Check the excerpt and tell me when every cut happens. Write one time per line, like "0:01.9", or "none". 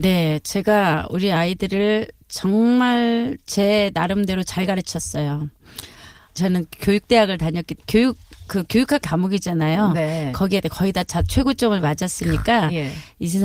0:02.2
0:07.8
0:09.0